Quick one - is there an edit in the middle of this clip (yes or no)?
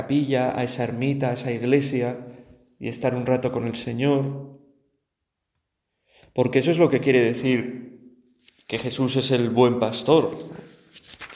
no